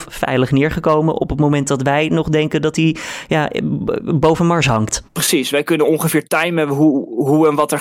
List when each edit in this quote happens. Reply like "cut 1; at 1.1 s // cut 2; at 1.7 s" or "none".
cut 1; at 5.1 s